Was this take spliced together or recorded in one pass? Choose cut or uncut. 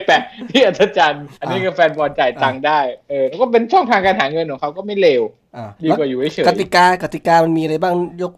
cut